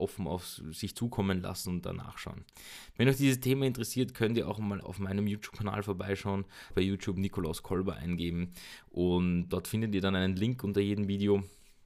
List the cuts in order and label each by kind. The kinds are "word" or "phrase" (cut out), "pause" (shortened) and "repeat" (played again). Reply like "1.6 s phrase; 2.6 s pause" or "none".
4.8 s word; 6.7 s word; 9.5 s word